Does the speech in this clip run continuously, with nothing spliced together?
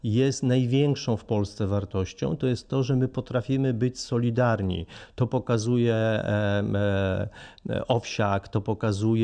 yes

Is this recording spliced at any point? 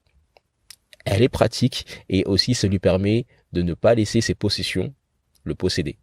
no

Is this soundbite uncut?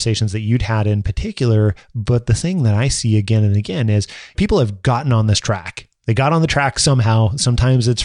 no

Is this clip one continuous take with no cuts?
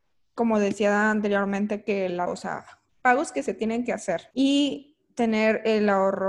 no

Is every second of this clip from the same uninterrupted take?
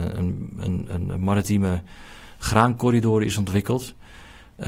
yes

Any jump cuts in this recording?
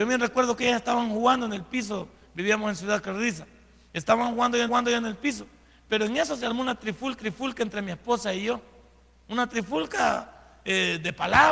yes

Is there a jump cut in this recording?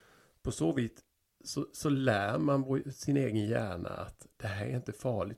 no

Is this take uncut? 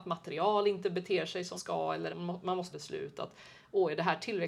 no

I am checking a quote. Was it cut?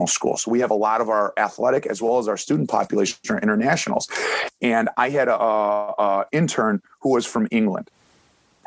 no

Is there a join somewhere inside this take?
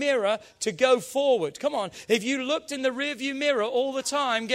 no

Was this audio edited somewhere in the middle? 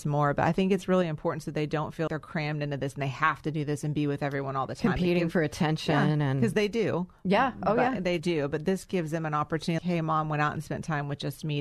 yes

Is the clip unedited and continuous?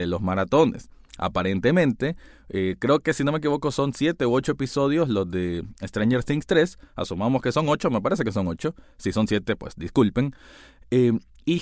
yes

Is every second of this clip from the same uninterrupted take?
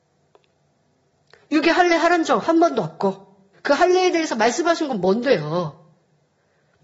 no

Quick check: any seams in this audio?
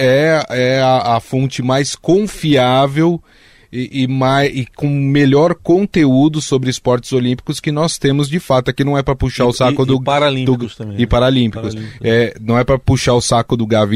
no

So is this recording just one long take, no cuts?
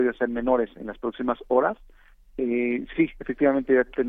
yes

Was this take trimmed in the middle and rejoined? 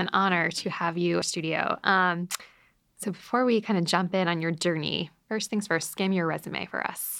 yes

